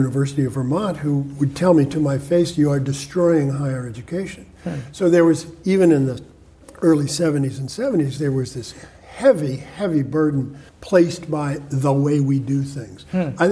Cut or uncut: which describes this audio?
cut